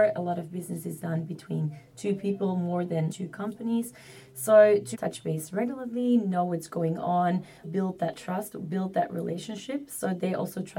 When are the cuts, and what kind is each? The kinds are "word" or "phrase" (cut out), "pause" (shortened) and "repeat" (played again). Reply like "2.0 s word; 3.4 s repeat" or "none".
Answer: 3.1 s word; 4.9 s phrase; 7.6 s word

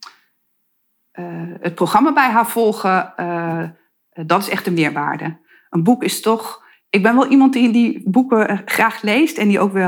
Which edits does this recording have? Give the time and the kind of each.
none

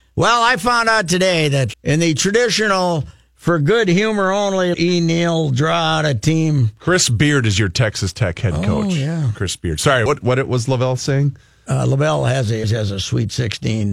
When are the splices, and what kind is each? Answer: 1.7 s word; 4.7 s word; 10.1 s word; 12.6 s word

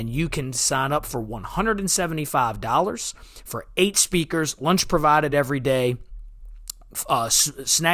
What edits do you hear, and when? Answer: none

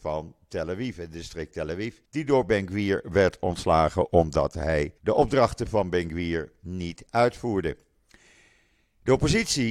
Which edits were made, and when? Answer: 2.1 s pause; 5.0 s pause

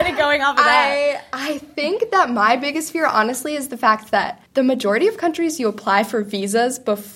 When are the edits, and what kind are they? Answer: 4.5 s pause

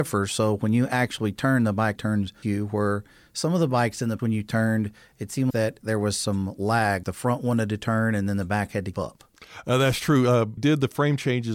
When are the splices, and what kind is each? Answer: 2.0 s word; 2.4 s word; 4.2 s word; 5.5 s word; 7.0 s word; 8.9 s word; 10.6 s word

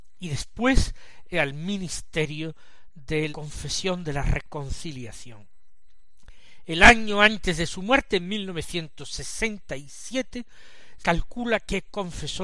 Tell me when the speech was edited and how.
1.3 s word; 3.3 s word; 11.0 s word

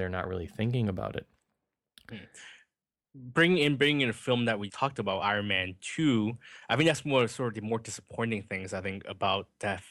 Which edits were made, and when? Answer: 4.7 s word

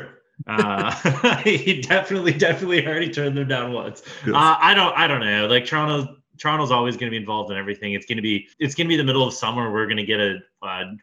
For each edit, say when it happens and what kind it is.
8.5 s pause

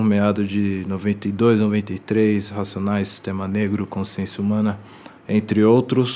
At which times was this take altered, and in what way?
5.2 s pause

